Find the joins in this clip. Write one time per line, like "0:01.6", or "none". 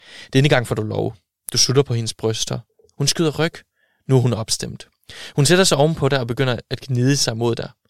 none

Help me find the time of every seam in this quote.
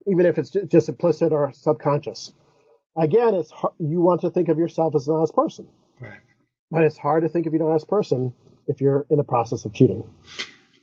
none

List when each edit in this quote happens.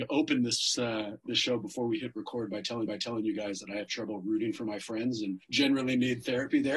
0:02.9
0:05.4

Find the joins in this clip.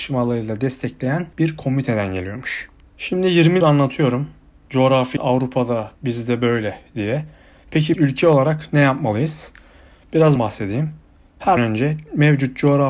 0:01.3
0:03.6
0:05.2
0:05.9
0:07.9
0:10.4
0:11.6

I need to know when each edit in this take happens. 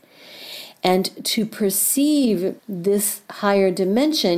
0:02.6

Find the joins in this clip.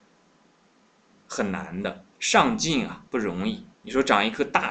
0:02.1
0:03.1
0:03.7

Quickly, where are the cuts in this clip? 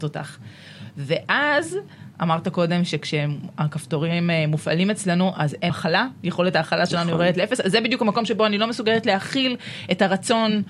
0:05.7

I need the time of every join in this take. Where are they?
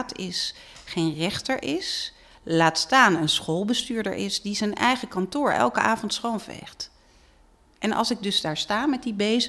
none

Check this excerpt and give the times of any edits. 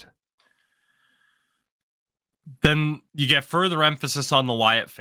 0:03.1

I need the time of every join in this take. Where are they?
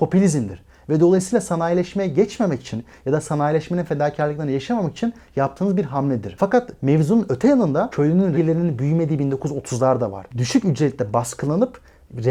0:08.3

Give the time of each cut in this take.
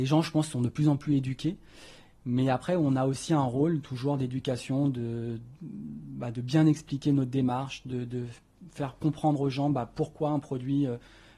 none

